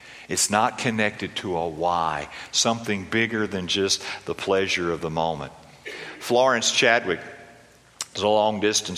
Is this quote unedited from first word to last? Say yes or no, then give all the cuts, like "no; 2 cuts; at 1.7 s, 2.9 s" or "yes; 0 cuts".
yes; 0 cuts